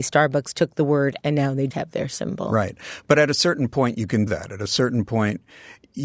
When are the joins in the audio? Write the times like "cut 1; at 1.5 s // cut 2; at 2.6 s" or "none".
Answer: cut 1; at 1.2 s // cut 2; at 1.7 s // cut 3; at 4.3 s